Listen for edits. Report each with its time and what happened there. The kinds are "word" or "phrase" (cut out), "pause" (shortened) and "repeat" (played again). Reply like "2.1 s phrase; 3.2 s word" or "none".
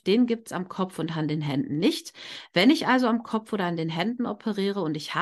none

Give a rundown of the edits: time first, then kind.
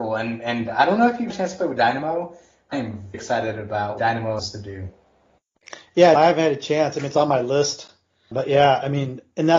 1.3 s word; 2.7 s word; 3.1 s word; 4.0 s word; 4.4 s word; 6.1 s word; 8.3 s word

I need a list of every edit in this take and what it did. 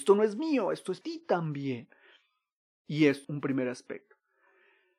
1.0 s word; 3.2 s word

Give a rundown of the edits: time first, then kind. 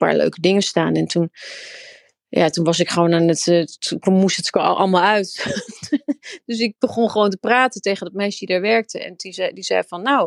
none

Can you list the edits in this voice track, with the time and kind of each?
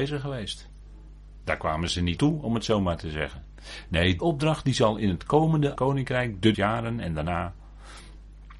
2.2 s word; 4.2 s word; 5.7 s word; 6.5 s word

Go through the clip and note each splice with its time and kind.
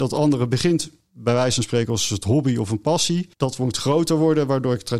3.3 s pause

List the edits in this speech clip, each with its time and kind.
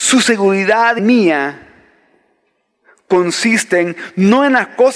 1.0 s word

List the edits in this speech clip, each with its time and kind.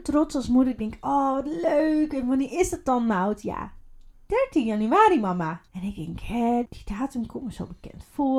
5.7 s pause; 6.6 s word

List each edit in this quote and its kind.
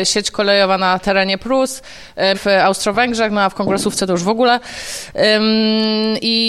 2.3 s word

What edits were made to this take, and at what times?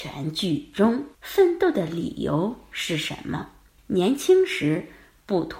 1.1 s pause; 3.8 s pause

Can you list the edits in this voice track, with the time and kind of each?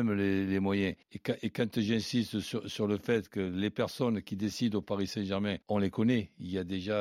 1.0 s pause; 5.6 s pause

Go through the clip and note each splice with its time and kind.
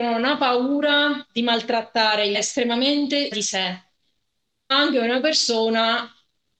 2.3 s phrase; 3.3 s word; 4.7 s word

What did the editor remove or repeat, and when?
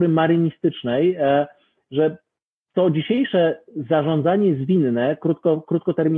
none

